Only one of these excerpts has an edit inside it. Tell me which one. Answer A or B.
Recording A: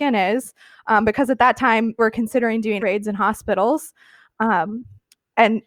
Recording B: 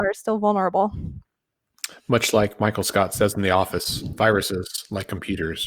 A